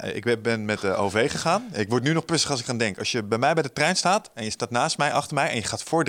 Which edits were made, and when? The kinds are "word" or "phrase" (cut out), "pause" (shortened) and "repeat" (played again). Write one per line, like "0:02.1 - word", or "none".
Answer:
none